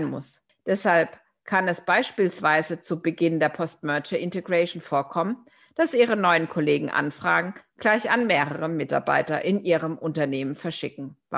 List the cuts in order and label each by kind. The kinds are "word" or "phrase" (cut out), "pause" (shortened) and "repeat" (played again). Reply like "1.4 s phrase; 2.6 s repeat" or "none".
none